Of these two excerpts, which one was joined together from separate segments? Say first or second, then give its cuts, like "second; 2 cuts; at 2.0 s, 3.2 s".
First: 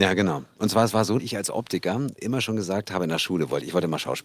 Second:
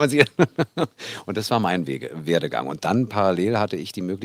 first; 2 cuts; at 1.2 s, 2.2 s